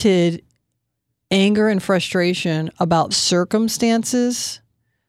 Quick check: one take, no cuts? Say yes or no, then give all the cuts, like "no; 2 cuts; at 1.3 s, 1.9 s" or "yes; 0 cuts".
no; 1 cut; at 3.1 s